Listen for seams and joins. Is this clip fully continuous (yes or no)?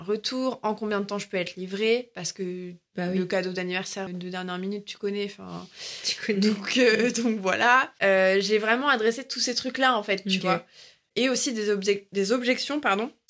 no